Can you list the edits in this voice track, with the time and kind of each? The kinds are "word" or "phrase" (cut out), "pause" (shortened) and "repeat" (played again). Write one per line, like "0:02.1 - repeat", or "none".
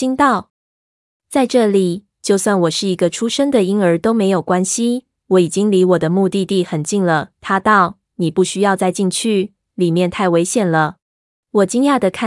0:11.0 - pause